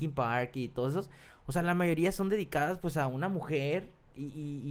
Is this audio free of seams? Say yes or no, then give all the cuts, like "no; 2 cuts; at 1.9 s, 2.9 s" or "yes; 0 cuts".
yes; 0 cuts